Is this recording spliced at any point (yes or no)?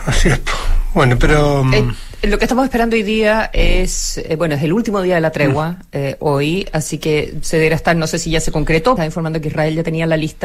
yes